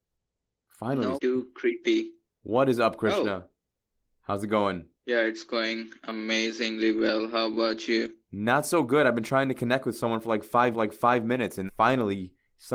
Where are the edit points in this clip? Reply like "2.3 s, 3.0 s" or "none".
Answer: 1.2 s, 2.2 s, 4.9 s, 8.2 s, 10.7 s, 11.7 s